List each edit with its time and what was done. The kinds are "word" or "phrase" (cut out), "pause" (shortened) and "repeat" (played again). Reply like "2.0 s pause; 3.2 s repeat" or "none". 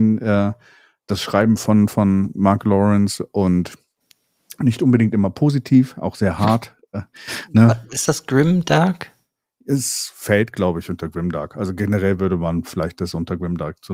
none